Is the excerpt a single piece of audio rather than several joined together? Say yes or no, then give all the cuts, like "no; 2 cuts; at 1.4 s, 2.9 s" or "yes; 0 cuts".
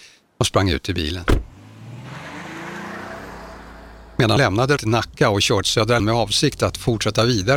no; 4 cuts; at 4.4 s, 4.8 s, 5.6 s, 6.0 s